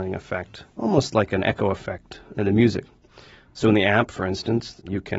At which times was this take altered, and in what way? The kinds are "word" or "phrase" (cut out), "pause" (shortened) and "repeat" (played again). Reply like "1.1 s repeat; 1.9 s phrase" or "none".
none